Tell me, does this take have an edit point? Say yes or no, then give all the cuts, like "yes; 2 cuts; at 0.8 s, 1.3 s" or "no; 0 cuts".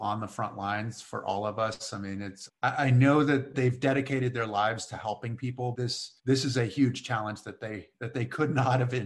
yes; 4 cuts; at 2.5 s, 3.5 s, 5.7 s, 6.2 s